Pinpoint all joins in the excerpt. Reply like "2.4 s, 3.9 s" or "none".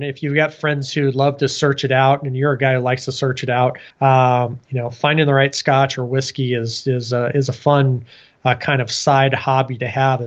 3.9 s